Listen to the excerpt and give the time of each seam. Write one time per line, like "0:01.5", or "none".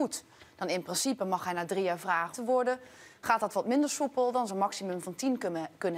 0:02.3
0:04.5